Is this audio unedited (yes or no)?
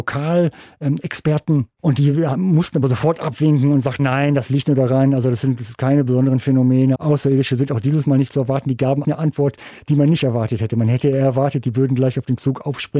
no